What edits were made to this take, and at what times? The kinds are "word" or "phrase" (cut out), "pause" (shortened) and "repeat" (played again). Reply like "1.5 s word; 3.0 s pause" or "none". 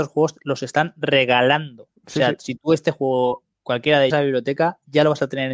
4.1 s phrase